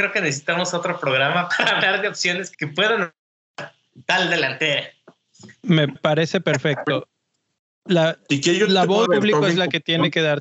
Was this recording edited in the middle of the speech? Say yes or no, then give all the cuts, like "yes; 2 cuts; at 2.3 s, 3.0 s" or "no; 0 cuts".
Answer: yes; 4 cuts; at 1.5 s, 2.5 s, 6.0 s, 9.1 s